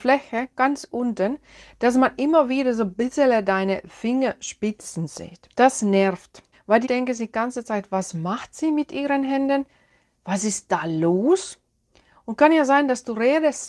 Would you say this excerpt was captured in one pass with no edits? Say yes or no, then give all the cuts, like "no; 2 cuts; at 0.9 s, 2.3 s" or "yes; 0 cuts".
no; 3 cuts; at 5.5 s, 6.5 s, 6.8 s